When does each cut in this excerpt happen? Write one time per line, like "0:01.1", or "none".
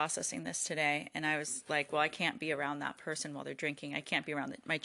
none